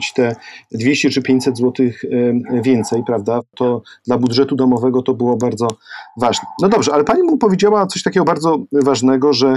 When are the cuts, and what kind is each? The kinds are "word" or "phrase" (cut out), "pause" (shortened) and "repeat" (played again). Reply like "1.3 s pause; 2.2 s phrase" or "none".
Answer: none

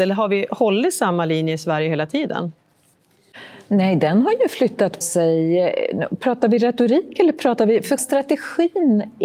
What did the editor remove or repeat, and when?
5.0 s word; 8.0 s word

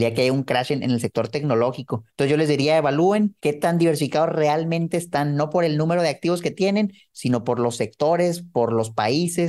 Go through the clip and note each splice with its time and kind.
2.1 s pause; 3.4 s pause

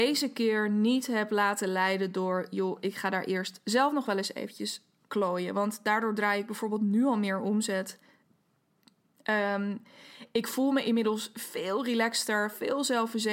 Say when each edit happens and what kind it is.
5.1 s word

